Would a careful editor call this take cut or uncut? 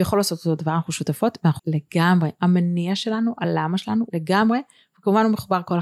cut